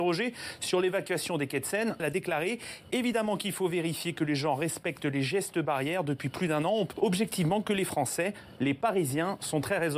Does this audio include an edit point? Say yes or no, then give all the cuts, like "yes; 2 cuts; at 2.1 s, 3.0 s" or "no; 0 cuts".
yes; 2 cuts; at 2.0 s, 6.9 s